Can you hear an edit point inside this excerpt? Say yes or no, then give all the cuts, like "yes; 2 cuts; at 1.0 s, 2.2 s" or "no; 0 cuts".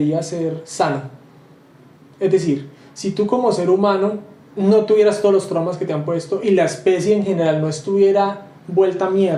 no; 0 cuts